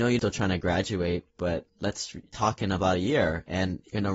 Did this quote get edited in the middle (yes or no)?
no